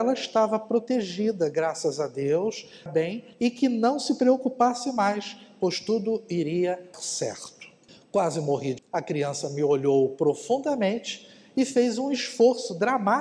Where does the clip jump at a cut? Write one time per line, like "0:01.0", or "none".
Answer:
0:02.9
0:03.3
0:06.9
0:07.9
0:08.8